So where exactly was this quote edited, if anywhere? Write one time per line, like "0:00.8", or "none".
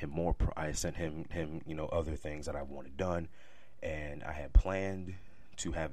0:01.3